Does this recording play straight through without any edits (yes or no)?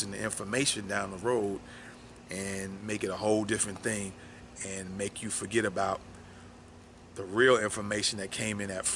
yes